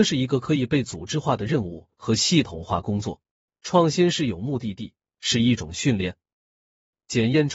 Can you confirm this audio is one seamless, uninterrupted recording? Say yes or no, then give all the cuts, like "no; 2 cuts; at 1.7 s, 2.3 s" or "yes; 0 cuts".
no; 1 cut; at 3.3 s